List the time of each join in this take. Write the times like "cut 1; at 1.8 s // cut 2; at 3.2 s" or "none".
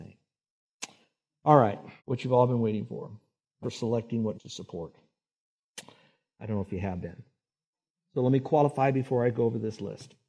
cut 1; at 2.0 s // cut 2; at 3.6 s // cut 3; at 4.3 s